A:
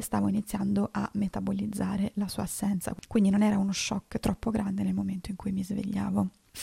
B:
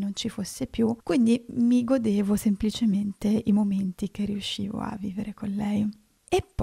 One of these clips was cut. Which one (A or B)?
B